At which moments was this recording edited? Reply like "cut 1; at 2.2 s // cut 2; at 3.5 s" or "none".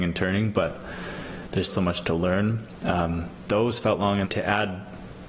cut 1; at 1.7 s // cut 2; at 3.4 s // cut 3; at 4.2 s